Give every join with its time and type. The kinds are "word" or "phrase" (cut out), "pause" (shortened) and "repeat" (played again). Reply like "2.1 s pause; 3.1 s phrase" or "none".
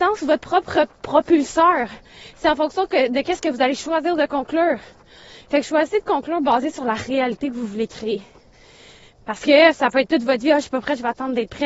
none